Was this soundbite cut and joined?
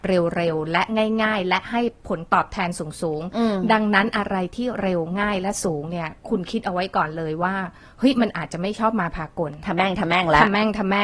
no; 0 cuts

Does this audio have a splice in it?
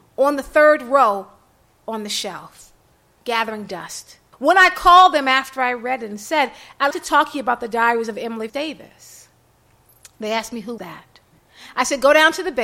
yes; 4 cuts; at 4.3 s, 6.9 s, 8.5 s, 10.8 s

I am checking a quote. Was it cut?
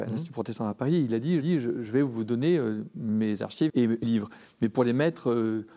yes; 3 cuts; at 1.4 s, 3.7 s, 4.0 s

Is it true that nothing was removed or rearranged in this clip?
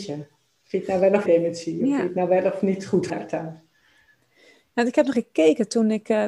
no; 3 cuts; at 1.3 s, 3.1 s, 5.1 s

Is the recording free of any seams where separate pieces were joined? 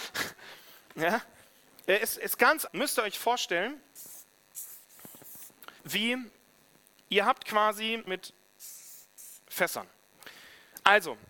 no; 4 cuts; at 2.2 s, 2.7 s, 5.8 s, 8.1 s

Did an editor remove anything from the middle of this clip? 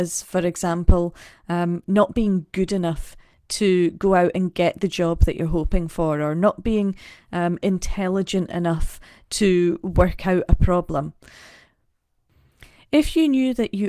no; 0 cuts

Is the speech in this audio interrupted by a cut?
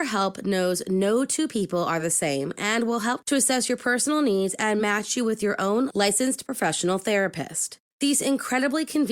no; 0 cuts

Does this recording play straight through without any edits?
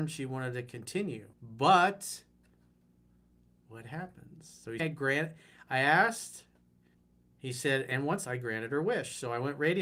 no; 4 cuts; at 1.3 s, 4.8 s, 6.9 s, 8.2 s

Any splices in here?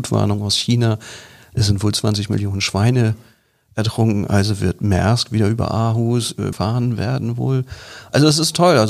yes; 1 cut; at 6.5 s

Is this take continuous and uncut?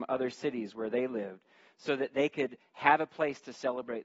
yes; 0 cuts

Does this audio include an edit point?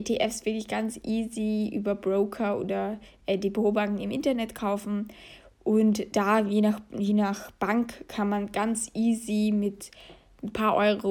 no; 0 cuts

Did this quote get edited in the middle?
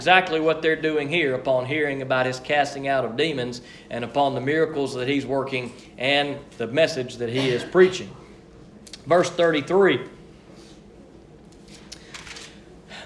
no; 0 cuts

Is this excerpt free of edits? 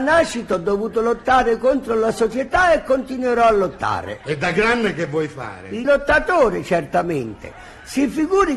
yes; 0 cuts

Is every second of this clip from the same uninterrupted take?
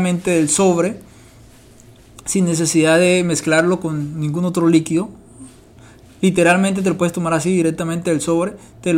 yes; 0 cuts

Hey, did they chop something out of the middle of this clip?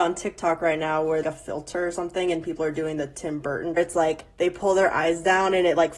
yes; 2 cuts; at 1.2 s, 3.8 s

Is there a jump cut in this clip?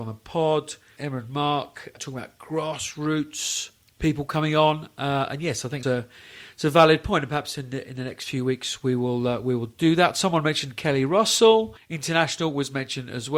yes; 3 cuts; at 3.8 s, 5.8 s, 11.8 s

